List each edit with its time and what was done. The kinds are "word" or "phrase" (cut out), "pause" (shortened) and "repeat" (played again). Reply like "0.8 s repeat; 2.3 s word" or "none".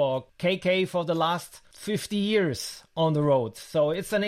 none

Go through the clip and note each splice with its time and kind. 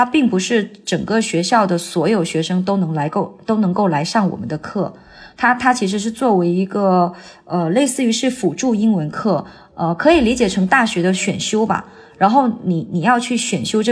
none

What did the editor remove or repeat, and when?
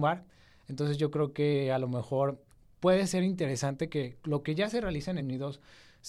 5.2 s word

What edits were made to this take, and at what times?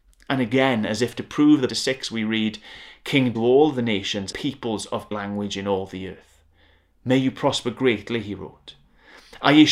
1.7 s phrase; 3.3 s phrase; 4.3 s word; 5.1 s word

